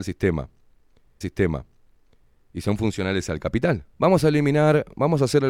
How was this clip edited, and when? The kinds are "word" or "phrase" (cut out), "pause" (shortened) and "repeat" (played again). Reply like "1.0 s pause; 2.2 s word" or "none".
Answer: 1.2 s repeat; 3.9 s pause